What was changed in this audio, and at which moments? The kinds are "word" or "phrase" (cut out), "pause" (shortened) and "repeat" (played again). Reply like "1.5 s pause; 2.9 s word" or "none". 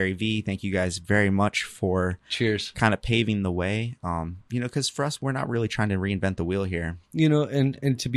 7.0 s pause